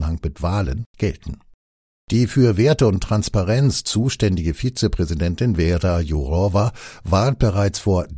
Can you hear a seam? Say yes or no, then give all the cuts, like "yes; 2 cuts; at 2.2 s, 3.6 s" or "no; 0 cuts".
no; 0 cuts